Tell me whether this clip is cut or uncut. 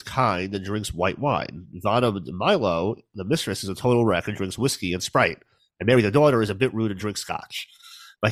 uncut